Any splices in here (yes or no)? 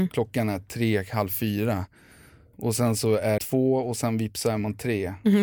yes